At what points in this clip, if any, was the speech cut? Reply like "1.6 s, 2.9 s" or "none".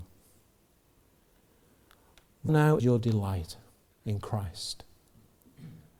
2.5 s, 2.8 s